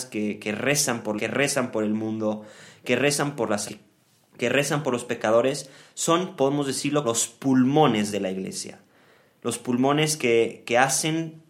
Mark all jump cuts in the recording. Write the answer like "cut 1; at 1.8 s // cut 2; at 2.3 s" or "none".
cut 1; at 1.2 s // cut 2; at 3.7 s // cut 3; at 7.0 s